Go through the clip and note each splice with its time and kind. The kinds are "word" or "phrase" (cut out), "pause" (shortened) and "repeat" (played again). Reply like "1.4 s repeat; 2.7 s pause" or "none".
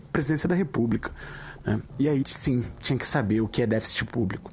2.2 s word